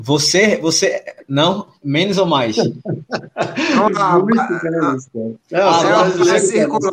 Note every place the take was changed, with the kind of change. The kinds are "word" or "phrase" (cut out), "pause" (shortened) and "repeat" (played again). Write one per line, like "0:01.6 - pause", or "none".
0:05.4 - pause